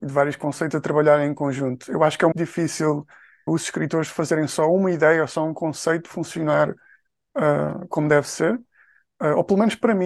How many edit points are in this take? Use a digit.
2